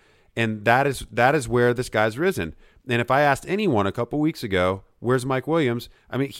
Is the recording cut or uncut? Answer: uncut